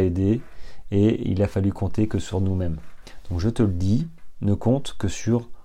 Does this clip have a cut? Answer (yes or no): no